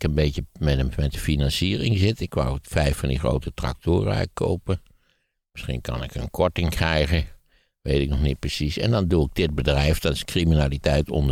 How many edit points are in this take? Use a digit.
0